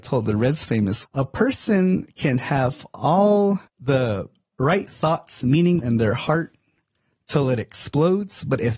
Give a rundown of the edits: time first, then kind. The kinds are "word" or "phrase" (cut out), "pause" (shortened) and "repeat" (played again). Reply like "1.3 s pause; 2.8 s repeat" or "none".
1.0 s phrase; 3.7 s pause; 5.8 s word